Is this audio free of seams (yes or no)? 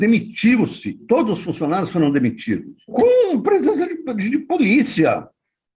yes